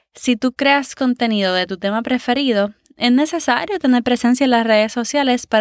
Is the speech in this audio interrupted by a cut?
no; 0 cuts

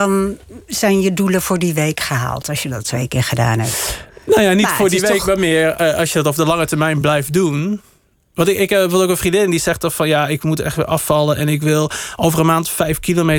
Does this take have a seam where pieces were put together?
no; 0 cuts

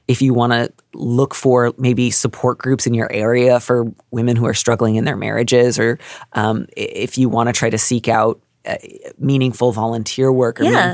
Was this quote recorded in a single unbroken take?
yes; 0 cuts

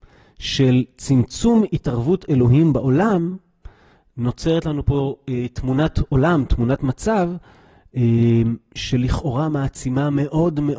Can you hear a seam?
no; 0 cuts

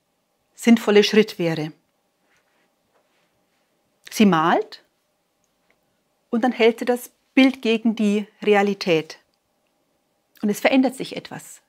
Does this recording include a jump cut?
no; 0 cuts

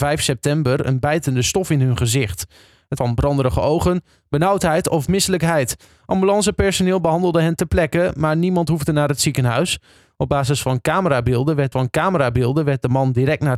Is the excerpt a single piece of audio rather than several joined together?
no; 2 cuts; at 3.0 s, 11.7 s

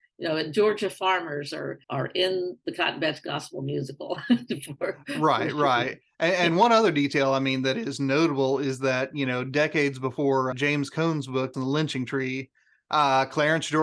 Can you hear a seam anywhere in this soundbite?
yes; 3 cuts; at 1.8 s, 10.5 s, 11.5 s

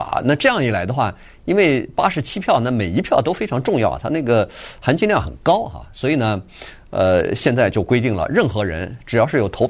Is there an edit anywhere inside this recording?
no; 0 cuts

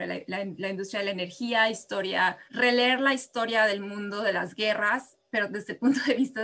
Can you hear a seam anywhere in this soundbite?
yes; 1 cut; at 2.5 s

